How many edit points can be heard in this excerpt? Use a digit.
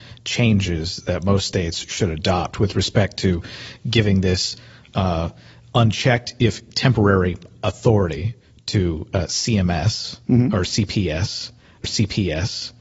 1